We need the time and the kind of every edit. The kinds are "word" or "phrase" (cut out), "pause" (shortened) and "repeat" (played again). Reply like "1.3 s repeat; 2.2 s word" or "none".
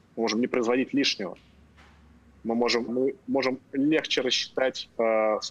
2.9 s word